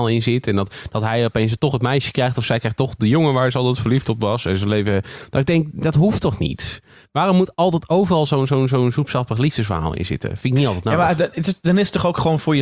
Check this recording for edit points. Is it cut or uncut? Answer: uncut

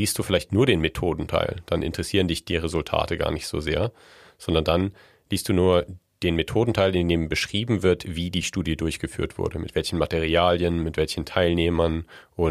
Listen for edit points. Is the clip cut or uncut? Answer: uncut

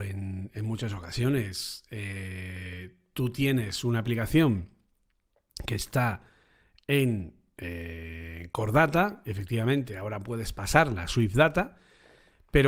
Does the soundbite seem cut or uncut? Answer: uncut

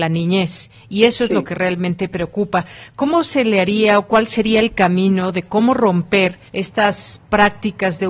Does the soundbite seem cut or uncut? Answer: cut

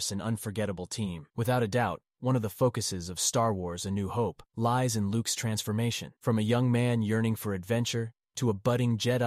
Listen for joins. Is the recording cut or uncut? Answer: cut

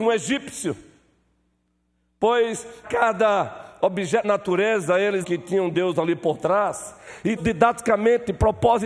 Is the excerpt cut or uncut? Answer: cut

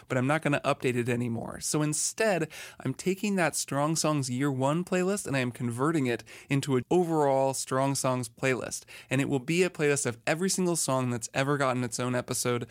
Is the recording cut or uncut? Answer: cut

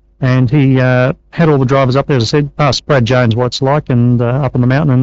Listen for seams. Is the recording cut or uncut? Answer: cut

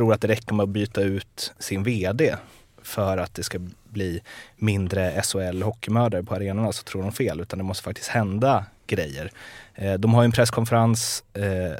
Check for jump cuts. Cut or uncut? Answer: uncut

